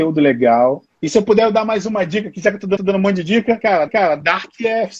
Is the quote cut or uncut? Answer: cut